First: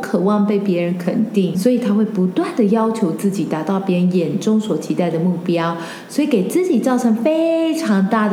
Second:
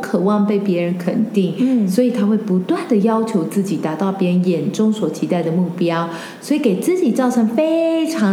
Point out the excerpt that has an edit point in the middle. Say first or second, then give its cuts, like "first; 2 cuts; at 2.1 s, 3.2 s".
first; 1 cut; at 1.5 s